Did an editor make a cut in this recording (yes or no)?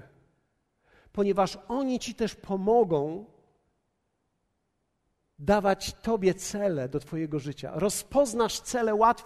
no